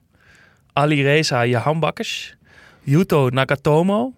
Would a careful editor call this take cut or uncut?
uncut